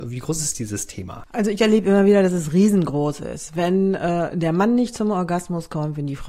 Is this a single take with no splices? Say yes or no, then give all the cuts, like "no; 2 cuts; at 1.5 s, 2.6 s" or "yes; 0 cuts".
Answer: yes; 0 cuts